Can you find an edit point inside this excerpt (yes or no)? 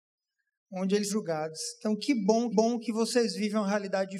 yes